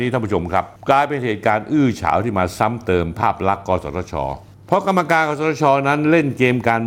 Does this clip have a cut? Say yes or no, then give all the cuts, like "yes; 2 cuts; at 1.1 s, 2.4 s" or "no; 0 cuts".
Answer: no; 0 cuts